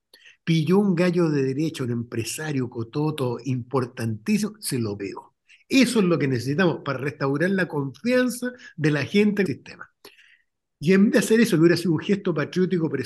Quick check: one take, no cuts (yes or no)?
no